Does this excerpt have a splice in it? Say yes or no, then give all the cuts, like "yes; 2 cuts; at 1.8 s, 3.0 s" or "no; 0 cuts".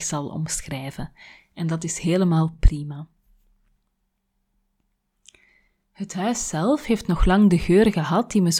no; 0 cuts